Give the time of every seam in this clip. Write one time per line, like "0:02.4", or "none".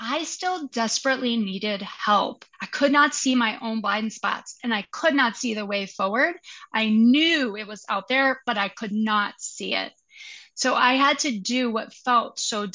0:02.5
0:04.9